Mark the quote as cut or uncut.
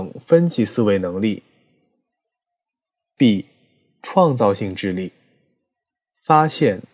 uncut